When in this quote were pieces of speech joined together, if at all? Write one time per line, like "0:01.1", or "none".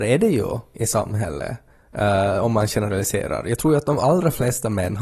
none